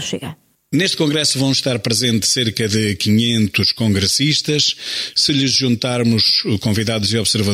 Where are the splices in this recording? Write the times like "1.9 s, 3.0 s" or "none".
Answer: none

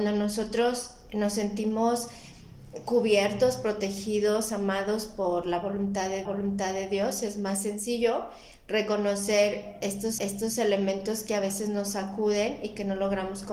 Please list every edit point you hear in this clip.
6.2 s, 10.2 s

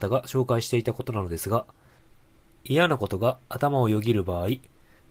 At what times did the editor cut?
none

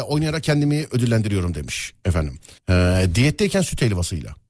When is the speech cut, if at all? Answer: 2.6 s

